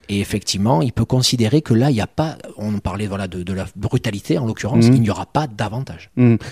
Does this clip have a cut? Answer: no; 0 cuts

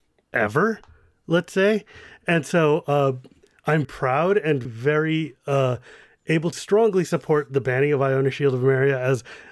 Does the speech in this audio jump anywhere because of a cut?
yes; 3 cuts; at 3.8 s, 4.6 s, 6.5 s

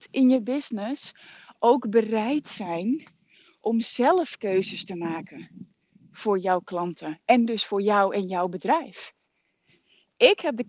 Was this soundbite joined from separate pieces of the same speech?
no; 0 cuts

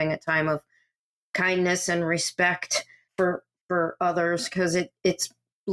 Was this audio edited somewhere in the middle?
yes; 1 cut; at 3.1 s

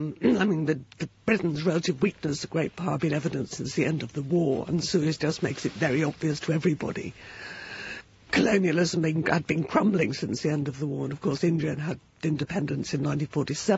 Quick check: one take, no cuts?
yes; 0 cuts

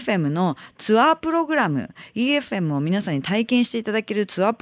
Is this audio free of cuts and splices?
yes; 0 cuts

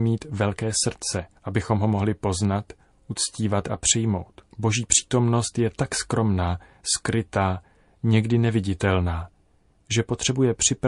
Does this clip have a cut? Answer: yes; 2 cuts; at 1.3 s, 4.5 s

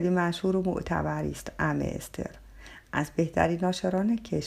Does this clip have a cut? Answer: no; 0 cuts

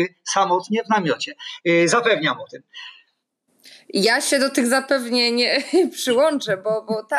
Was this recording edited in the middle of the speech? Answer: no; 0 cuts

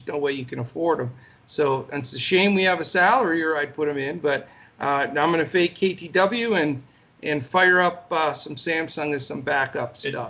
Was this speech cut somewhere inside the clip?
no; 0 cuts

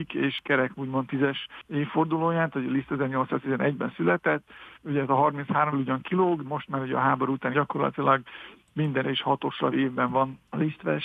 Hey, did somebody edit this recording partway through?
yes; 6 cuts; at 4.7 s, 5.7 s, 6.4 s, 7.5 s, 9.0 s, 9.7 s

